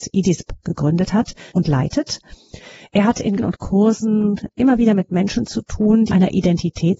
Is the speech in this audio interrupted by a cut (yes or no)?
yes